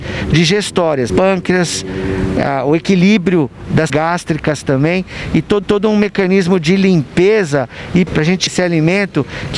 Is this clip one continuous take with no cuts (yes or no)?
no